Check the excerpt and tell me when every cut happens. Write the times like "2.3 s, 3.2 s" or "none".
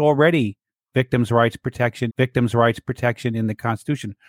2.1 s